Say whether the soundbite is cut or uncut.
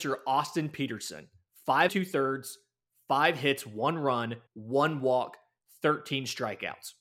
cut